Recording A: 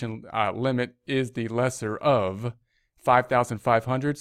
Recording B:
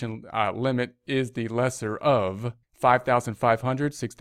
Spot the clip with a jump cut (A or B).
B